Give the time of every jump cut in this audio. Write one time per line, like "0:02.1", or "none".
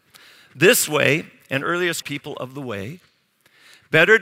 0:02.0